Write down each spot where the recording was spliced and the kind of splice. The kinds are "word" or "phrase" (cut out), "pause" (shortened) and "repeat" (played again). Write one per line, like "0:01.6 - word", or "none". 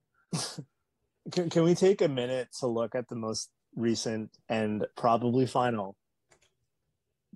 0:04.9 - pause